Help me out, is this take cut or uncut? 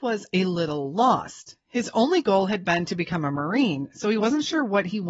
uncut